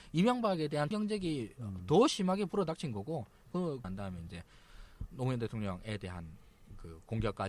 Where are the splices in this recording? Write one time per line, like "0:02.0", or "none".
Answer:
0:00.9
0:03.8